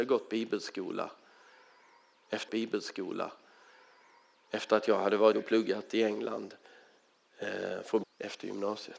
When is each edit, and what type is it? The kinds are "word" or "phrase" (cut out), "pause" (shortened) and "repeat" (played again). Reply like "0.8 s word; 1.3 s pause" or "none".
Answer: 2.5 s repeat; 5.3 s word; 8.0 s phrase

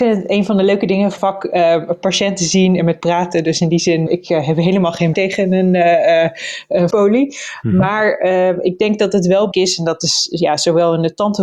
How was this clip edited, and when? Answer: 1.2 s word; 3.0 s word; 4.1 s word; 5.1 s word; 6.9 s word; 9.5 s word

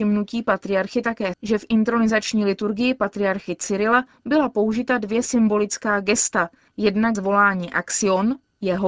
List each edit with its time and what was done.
1.3 s word; 7.1 s word

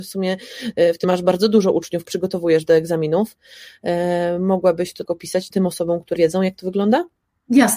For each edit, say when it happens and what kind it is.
1.0 s word; 2.0 s word; 5.0 s word; 5.5 s word; 6.2 s word

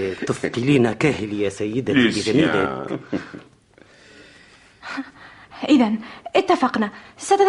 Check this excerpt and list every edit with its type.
none

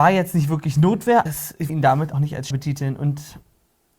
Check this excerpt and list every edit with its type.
1.3 s word; 1.7 s word; 2.1 s word; 2.5 s word

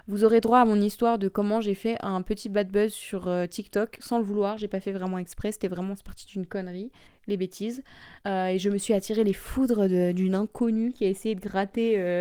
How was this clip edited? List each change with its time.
7.1 s pause; 8.2 s pause

